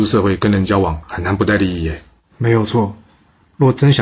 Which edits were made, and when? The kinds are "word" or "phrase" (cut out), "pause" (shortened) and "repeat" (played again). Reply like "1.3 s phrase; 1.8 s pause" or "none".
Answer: 2.2 s pause